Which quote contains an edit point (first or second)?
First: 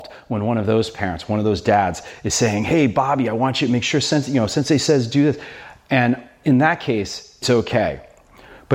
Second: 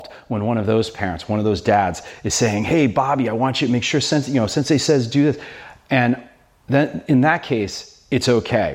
first